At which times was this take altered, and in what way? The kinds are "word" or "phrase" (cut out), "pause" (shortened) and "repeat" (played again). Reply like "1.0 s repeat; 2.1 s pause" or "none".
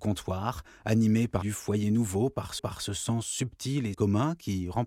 1.4 s word; 2.6 s repeat; 3.9 s phrase